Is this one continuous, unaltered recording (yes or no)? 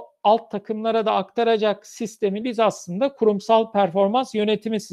no